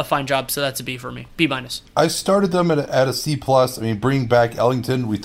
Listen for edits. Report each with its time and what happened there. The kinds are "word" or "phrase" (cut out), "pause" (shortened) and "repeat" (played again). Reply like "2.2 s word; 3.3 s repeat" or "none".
none